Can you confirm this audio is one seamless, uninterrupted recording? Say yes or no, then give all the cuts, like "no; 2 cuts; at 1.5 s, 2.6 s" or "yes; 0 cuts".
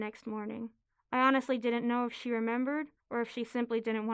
no; 1 cut; at 3.0 s